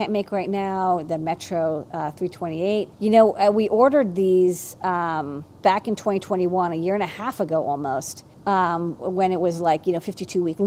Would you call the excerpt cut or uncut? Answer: cut